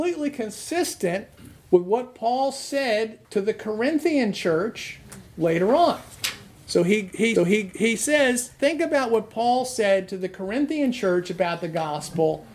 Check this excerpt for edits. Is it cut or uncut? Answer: cut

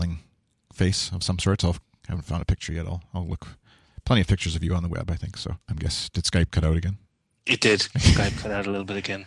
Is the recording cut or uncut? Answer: cut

